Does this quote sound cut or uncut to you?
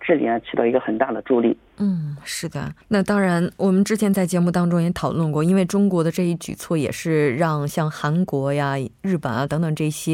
cut